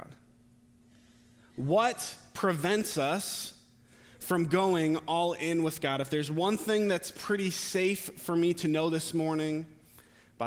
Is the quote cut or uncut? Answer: uncut